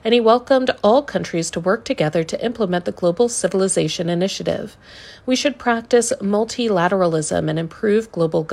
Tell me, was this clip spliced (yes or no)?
no